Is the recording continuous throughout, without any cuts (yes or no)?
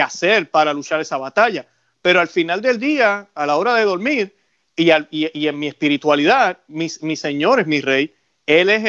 yes